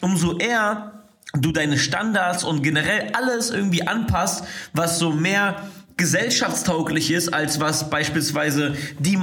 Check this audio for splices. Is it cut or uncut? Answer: uncut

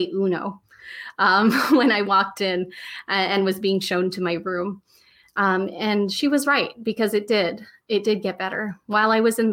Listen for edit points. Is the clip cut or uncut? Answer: uncut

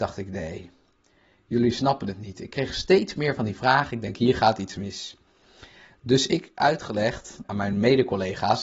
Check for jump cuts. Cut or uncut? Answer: uncut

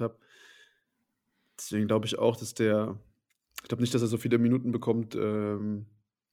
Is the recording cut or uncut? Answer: uncut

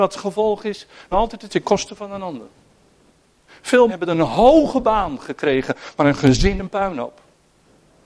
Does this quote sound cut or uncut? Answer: cut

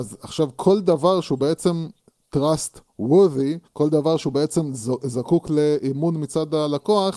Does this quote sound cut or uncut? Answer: cut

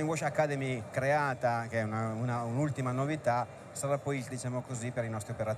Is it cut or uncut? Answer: cut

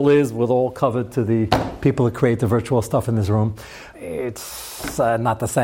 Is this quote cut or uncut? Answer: cut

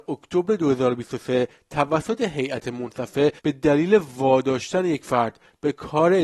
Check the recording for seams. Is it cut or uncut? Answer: cut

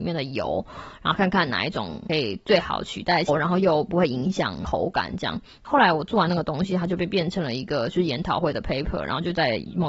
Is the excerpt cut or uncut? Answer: uncut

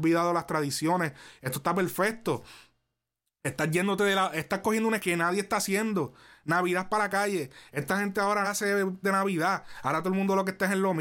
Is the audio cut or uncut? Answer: cut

